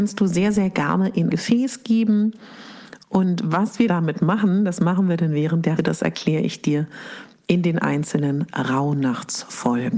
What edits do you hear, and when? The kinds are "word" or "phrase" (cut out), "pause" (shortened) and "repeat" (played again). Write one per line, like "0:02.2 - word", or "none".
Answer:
0:01.3 - word
0:03.9 - word
0:05.8 - word